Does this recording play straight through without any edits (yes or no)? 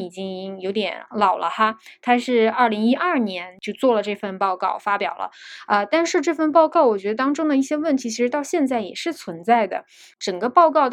yes